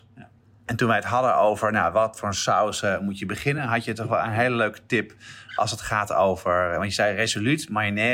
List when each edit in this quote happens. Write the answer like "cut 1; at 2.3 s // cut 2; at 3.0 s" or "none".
none